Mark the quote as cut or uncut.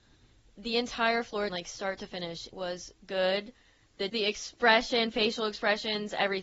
cut